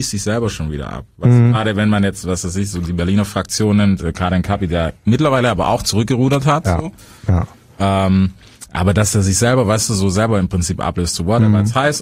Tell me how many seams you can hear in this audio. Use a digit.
1